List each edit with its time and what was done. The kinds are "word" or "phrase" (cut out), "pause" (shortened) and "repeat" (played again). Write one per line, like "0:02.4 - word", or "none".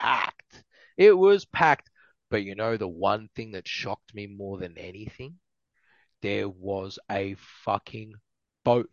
none